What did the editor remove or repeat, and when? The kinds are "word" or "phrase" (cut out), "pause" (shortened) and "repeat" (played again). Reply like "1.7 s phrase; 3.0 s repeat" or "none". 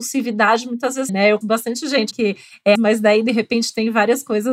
1.1 s word; 1.4 s word; 2.1 s word; 2.7 s word